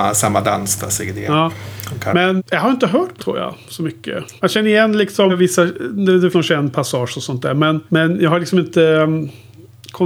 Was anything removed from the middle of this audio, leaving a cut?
yes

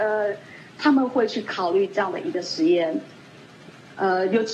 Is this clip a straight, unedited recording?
yes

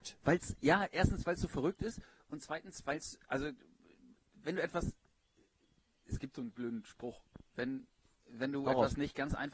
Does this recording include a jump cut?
no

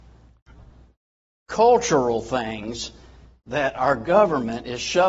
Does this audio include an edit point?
no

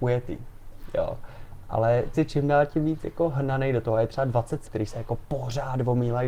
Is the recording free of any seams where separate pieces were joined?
no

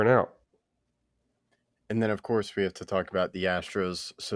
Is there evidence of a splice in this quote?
no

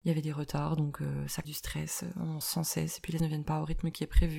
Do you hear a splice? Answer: yes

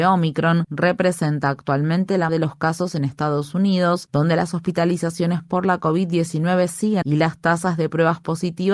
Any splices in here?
yes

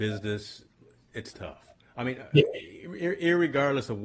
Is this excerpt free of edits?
no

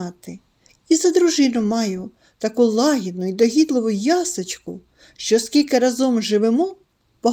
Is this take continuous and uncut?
yes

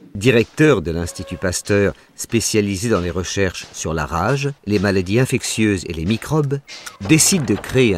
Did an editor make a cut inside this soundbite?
yes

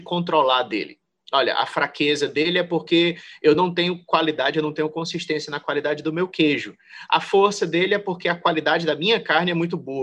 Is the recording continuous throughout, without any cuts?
yes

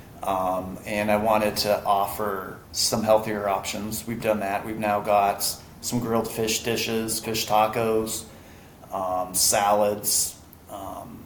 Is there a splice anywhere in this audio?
yes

